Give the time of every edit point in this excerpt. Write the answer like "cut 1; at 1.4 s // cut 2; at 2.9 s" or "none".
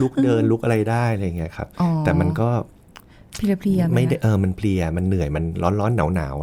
none